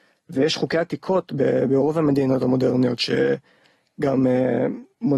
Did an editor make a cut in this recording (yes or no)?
no